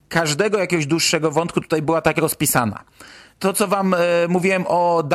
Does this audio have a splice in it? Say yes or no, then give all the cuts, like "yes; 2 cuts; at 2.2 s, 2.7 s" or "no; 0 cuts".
no; 0 cuts